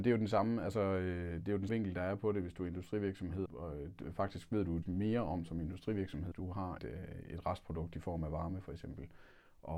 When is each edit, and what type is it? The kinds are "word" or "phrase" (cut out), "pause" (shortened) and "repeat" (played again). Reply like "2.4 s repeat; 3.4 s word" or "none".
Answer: 1.7 s word; 3.5 s word; 4.8 s word; 6.3 s word; 6.8 s word